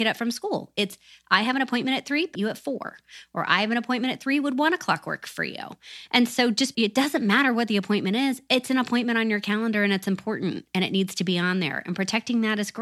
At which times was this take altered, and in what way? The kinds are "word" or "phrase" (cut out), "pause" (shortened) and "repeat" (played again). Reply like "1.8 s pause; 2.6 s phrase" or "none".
2.3 s phrase; 6.7 s phrase